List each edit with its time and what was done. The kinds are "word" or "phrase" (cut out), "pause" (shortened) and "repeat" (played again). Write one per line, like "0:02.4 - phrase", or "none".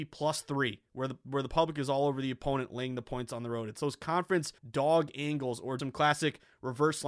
0:04.6 - pause
0:05.8 - word